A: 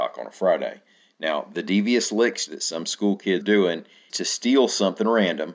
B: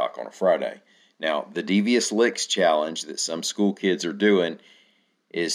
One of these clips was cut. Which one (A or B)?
A